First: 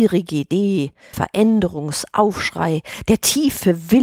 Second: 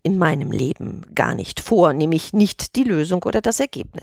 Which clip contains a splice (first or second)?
first